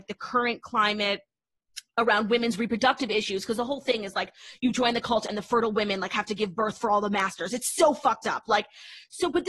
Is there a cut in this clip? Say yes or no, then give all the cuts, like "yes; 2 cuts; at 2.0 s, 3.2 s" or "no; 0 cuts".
no; 0 cuts